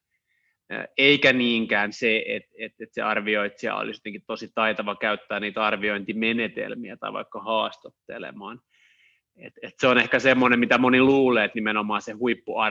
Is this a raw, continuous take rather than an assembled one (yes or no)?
yes